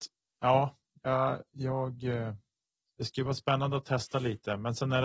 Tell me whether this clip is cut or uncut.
cut